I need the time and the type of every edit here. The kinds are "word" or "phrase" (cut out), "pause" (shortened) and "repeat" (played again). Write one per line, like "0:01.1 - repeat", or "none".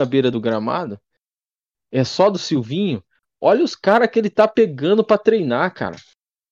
none